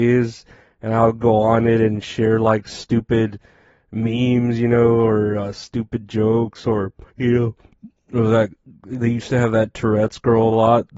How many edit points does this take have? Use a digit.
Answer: 1